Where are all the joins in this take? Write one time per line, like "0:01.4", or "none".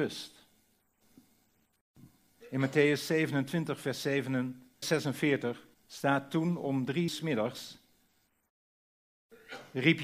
0:04.8
0:05.7
0:07.1